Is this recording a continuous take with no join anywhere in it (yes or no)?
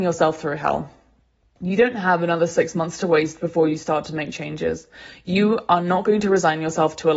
yes